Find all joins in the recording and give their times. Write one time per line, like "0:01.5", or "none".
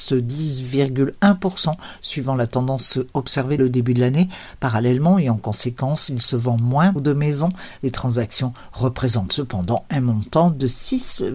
0:03.6
0:07.0